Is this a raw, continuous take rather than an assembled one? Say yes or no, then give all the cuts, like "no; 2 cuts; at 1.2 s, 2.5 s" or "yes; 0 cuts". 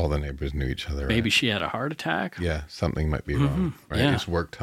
yes; 0 cuts